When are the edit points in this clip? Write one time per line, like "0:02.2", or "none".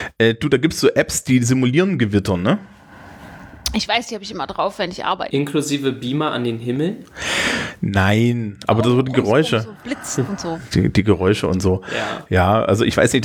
none